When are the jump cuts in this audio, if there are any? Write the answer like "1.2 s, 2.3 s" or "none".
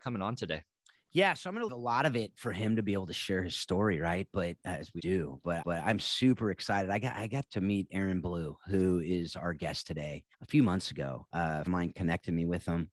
0.9 s, 1.7 s, 5.0 s, 5.6 s, 7.5 s, 10.3 s, 11.7 s